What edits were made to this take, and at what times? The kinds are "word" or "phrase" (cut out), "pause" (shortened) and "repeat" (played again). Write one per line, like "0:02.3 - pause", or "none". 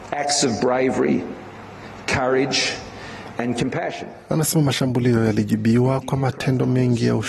none